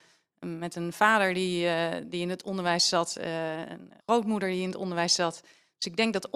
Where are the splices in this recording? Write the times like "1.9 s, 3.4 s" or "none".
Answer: 4.0 s